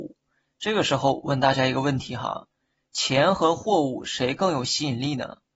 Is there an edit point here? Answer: no; 0 cuts

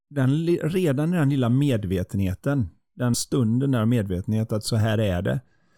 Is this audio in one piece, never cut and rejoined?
no; 1 cut; at 3.1 s

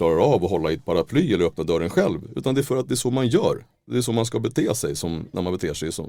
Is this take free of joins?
yes; 0 cuts

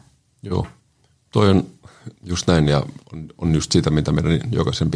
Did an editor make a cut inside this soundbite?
yes; 1 cut; at 2.2 s

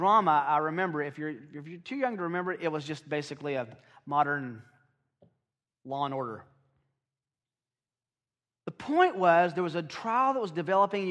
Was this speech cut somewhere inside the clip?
no; 0 cuts

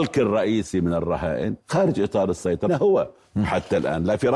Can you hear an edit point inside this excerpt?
yes; 2 cuts; at 1.6 s, 2.7 s

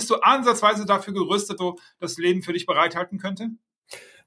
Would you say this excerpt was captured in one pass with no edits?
no; 1 cut; at 1.6 s

